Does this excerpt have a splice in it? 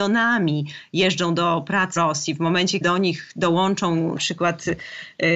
yes; 3 cuts; at 2.0 s, 2.8 s, 4.2 s

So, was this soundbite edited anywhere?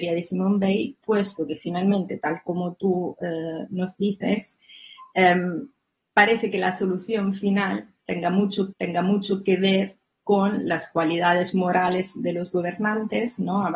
yes; 1 cut; at 8.7 s

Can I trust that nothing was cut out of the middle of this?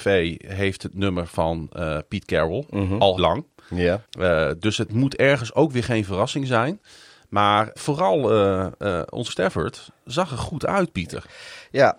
no; 4 cuts; at 3.2 s, 4.0 s, 7.8 s, 9.3 s

